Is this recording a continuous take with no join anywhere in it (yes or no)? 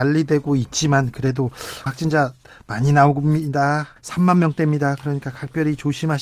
no